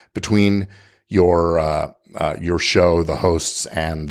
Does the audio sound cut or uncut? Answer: uncut